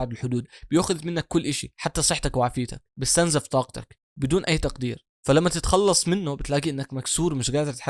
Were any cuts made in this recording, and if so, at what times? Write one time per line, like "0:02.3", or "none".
0:02.9
0:04.1
0:05.1